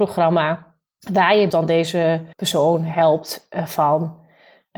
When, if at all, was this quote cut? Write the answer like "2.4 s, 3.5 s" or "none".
1.5 s, 2.3 s